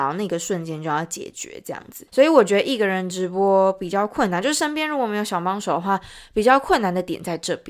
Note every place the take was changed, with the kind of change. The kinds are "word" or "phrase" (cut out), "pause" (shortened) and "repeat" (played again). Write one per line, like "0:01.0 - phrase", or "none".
0:02.1 - pause